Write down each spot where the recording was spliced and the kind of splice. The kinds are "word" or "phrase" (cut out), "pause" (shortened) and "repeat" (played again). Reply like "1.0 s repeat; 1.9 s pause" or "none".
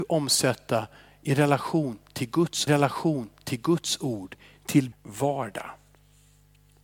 2.7 s repeat; 4.9 s phrase